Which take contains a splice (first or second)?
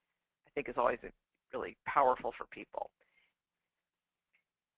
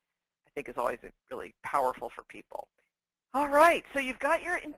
second